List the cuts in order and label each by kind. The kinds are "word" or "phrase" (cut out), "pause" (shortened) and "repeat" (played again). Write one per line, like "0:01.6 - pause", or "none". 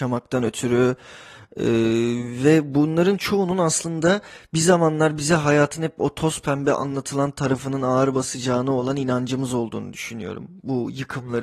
none